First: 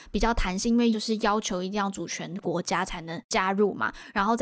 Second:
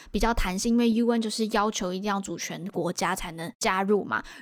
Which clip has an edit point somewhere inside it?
first; 1 cut; at 0.9 s

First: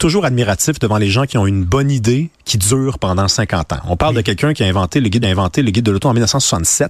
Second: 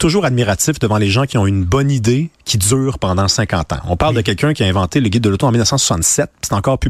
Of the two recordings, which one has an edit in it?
first; 1 cut; at 5.2 s

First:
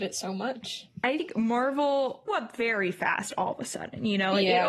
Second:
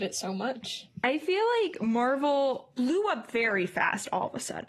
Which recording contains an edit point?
first; 2 cuts; at 1.2 s, 2.3 s

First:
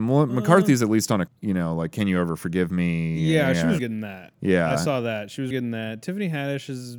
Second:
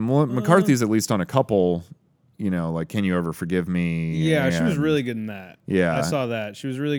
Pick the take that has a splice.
first; 3 cuts; at 1.3 s, 3.8 s, 5.5 s

